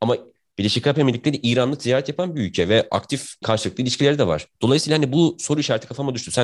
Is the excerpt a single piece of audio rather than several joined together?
no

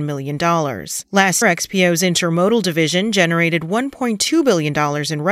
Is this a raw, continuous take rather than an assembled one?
no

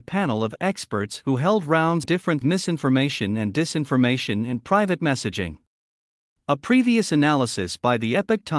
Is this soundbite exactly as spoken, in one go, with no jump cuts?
no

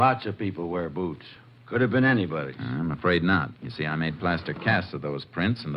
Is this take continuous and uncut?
yes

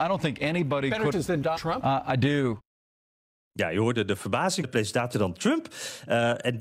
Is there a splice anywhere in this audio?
yes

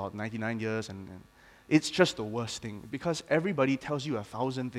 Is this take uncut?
yes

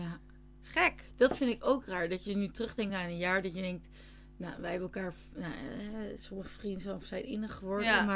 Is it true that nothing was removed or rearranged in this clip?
yes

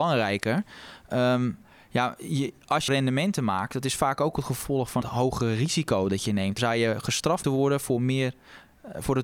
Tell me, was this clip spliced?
yes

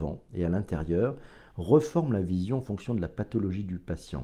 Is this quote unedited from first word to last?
yes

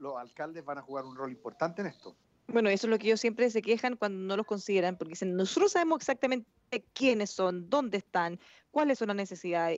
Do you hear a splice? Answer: yes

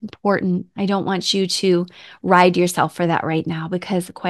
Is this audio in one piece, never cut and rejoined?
yes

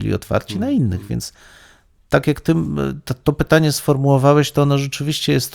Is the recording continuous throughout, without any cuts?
yes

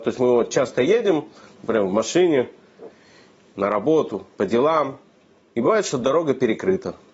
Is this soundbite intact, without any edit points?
yes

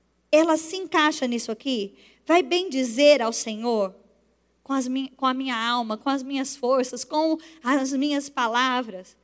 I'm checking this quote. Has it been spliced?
no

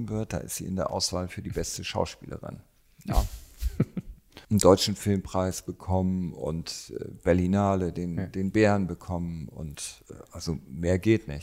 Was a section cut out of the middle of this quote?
no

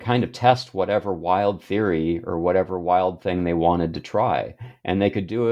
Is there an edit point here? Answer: no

